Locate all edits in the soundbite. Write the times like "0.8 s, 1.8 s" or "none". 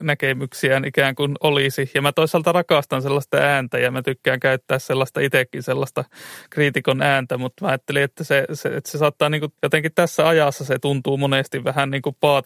9.6 s